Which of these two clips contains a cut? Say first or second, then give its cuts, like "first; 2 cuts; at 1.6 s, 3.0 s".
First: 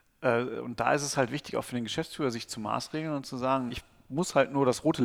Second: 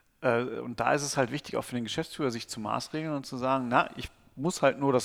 first; 1 cut; at 3.7 s